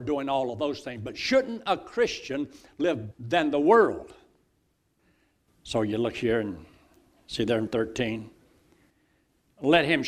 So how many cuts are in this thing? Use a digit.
2